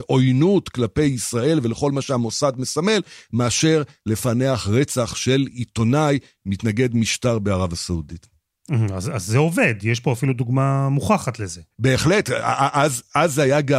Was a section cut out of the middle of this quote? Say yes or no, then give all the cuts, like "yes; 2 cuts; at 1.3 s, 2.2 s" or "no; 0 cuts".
yes; 2 cuts; at 8.6 s, 11.7 s